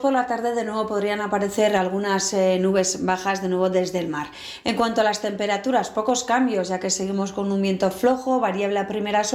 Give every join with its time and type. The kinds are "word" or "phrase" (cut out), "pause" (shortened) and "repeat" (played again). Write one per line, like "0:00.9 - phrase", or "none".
none